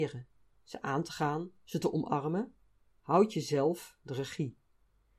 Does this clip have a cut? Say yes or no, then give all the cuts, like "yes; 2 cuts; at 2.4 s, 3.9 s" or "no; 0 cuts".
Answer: no; 0 cuts